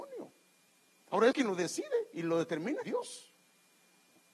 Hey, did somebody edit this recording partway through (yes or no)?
yes